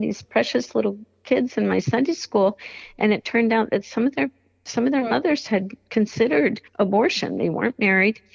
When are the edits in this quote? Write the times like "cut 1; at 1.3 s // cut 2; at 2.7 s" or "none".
cut 1; at 6.7 s